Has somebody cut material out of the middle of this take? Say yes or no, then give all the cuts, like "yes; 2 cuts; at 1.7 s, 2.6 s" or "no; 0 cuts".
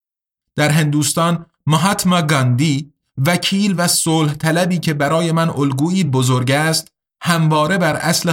no; 0 cuts